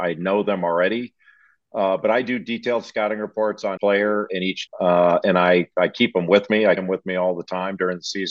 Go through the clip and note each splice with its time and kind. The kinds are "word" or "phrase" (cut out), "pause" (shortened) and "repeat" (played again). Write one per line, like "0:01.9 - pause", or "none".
0:03.8 - word
0:04.3 - word
0:04.7 - word
0:06.8 - word